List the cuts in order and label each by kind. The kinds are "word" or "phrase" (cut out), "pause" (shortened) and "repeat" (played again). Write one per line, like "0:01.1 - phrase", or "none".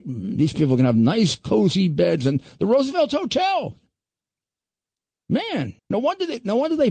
0:05.8 - pause